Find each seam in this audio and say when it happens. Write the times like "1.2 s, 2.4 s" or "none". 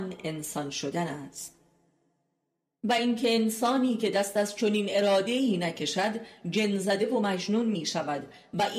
none